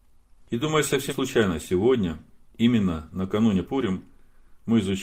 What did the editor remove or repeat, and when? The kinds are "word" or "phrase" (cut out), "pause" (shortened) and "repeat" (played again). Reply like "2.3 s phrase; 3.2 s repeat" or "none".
1.1 s word; 2.5 s pause; 3.6 s word